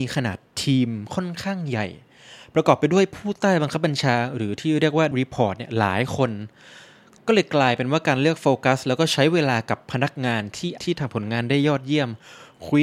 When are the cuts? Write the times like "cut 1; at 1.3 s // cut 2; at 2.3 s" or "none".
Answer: cut 1; at 5.1 s // cut 2; at 10.8 s